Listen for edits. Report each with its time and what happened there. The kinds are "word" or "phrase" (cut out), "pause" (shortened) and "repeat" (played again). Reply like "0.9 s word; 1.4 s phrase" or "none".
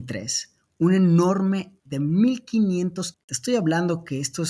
1.8 s word; 3.1 s word